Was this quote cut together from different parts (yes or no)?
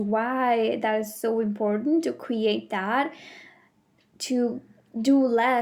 no